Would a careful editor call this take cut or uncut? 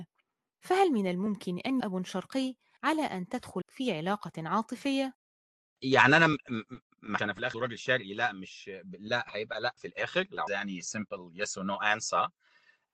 cut